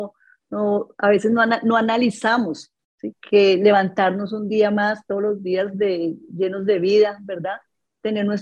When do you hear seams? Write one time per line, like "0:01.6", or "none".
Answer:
0:03.1